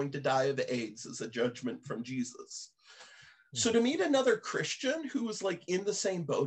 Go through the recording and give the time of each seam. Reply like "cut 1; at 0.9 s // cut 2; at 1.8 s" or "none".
none